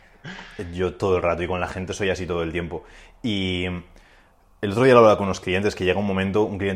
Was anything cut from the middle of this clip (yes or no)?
no